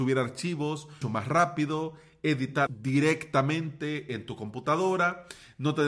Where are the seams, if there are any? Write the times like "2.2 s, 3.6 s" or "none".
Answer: 1.0 s, 2.7 s